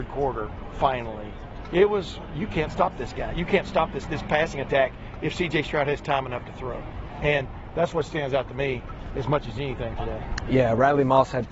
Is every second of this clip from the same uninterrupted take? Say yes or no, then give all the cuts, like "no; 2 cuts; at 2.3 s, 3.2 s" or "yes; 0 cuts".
no; 1 cut; at 4.0 s